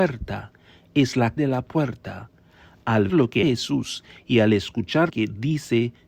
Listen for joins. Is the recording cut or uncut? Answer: cut